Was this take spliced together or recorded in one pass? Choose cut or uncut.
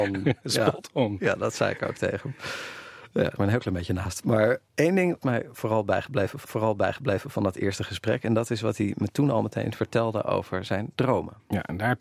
cut